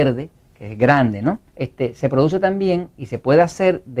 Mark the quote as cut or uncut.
cut